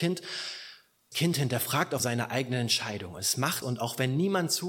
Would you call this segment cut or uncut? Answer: cut